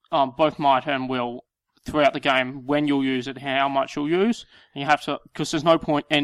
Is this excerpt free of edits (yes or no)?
yes